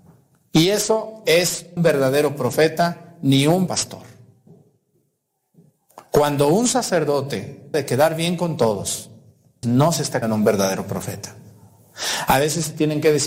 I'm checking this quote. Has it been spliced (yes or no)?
yes